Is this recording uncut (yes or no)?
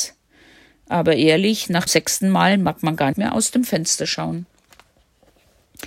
no